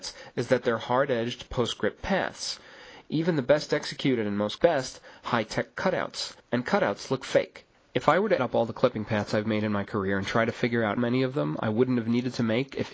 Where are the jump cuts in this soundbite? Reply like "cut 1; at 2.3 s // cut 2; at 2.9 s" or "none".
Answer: cut 1; at 4.6 s // cut 2; at 6.4 s // cut 3; at 7.7 s // cut 4; at 8.4 s // cut 5; at 11.0 s